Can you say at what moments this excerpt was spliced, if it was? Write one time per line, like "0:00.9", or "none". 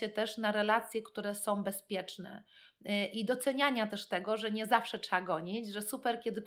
none

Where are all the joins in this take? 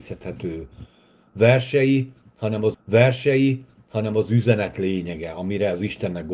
0:02.7

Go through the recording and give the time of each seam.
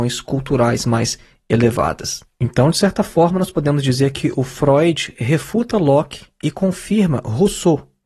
none

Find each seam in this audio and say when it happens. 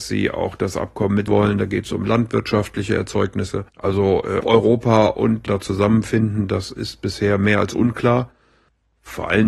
0:01.3
0:03.7
0:04.4
0:05.5

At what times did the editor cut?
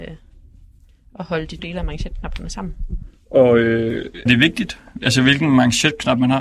0:01.6
0:04.3

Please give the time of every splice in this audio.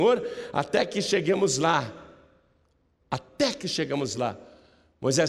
none

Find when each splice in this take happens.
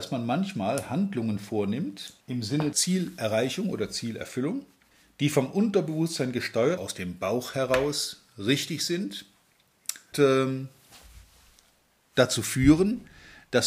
0:02.2
0:02.7
0:04.9
0:06.8
0:10.1

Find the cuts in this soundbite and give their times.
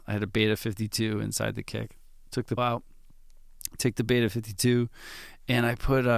0:02.6

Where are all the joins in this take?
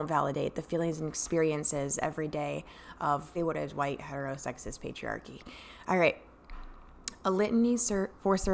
0:03.3

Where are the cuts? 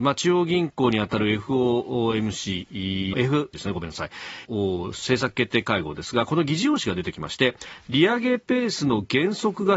0:03.1
0:03.5
0:04.4

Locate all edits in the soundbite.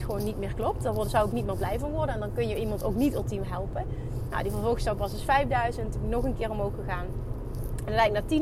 none

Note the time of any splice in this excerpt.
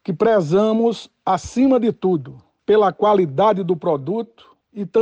none

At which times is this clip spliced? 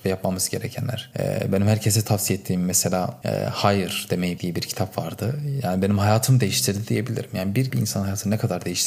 0:04.4
0:07.7

